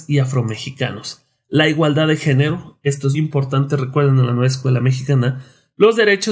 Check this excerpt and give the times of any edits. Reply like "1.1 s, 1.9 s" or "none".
3.1 s

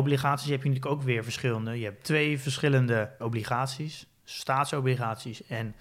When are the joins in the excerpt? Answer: none

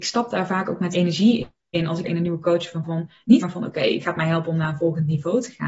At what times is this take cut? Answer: 0.9 s, 2.0 s, 2.8 s, 3.4 s, 4.0 s

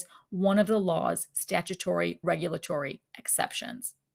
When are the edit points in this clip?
2.2 s

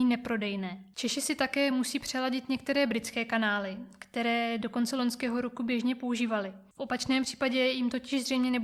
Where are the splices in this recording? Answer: none

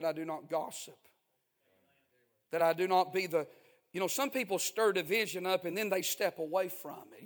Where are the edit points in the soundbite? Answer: none

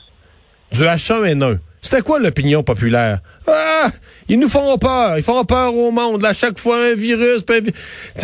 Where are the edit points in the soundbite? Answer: none

